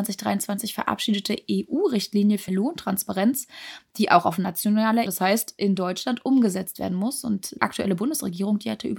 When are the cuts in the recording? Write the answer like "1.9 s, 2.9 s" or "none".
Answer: 2.5 s, 5.1 s, 7.6 s